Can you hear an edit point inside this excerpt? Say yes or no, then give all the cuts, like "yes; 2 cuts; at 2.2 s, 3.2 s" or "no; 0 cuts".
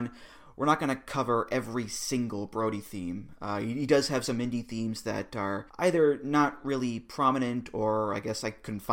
yes; 1 cut; at 5.7 s